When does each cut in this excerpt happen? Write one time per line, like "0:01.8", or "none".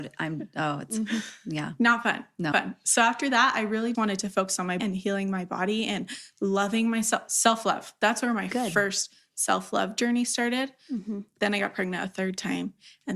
0:02.5
0:03.9
0:04.8